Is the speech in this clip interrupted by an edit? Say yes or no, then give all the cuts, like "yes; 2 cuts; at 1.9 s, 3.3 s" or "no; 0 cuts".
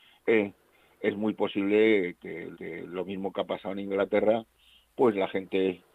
yes; 1 cut; at 2.5 s